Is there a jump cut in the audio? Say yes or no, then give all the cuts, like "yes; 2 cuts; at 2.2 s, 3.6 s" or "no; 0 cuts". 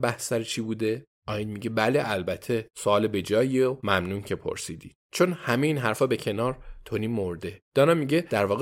yes; 3 cuts; at 1.1 s, 5.0 s, 7.7 s